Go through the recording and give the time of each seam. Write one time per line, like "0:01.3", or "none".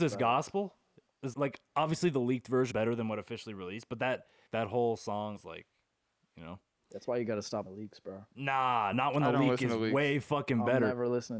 0:01.3
0:02.7
0:04.5
0:05.4
0:07.7
0:08.9